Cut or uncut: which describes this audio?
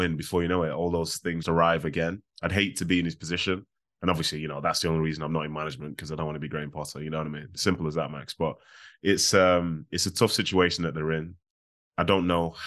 cut